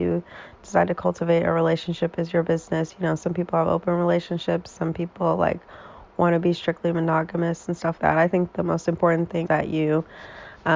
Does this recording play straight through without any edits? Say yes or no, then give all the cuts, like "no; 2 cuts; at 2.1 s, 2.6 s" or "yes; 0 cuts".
no; 2 cuts; at 8.0 s, 9.4 s